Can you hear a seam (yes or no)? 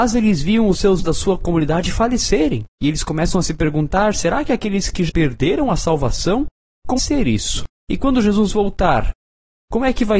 yes